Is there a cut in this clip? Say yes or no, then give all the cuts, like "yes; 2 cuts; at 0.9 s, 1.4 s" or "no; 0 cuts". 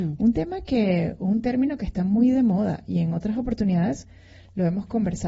no; 0 cuts